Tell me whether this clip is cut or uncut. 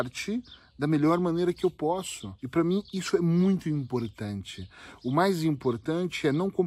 cut